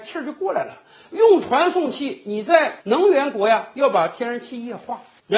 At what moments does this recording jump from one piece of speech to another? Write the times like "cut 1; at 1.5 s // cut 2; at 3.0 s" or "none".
cut 1; at 2.8 s